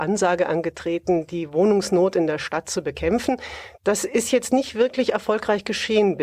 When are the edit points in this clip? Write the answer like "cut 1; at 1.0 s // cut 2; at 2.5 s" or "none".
cut 1; at 3.8 s